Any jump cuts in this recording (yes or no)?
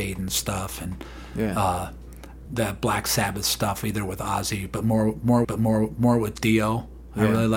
yes